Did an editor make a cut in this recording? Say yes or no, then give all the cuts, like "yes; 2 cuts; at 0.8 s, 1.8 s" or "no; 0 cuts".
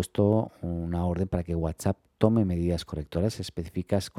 no; 0 cuts